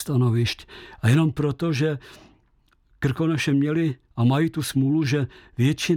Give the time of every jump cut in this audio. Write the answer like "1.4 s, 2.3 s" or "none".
none